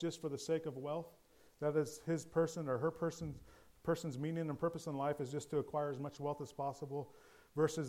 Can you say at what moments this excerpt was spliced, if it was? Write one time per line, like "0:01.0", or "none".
none